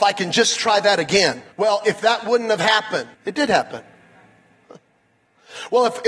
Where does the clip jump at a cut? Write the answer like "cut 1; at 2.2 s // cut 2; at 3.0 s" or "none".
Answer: cut 1; at 1.5 s // cut 2; at 3.1 s